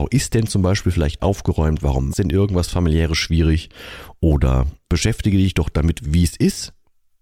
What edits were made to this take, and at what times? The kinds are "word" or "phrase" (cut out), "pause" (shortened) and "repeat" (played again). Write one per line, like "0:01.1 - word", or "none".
0:01.2 - word
0:02.1 - word
0:04.8 - word